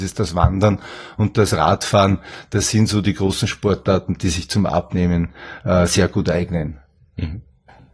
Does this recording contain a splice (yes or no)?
no